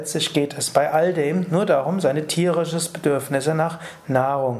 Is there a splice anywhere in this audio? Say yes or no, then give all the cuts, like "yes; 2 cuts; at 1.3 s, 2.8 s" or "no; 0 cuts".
no; 0 cuts